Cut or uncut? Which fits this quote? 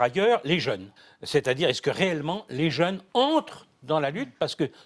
cut